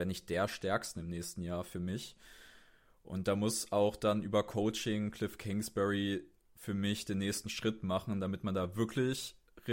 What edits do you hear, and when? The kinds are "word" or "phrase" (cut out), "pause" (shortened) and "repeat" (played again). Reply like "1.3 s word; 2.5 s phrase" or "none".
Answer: none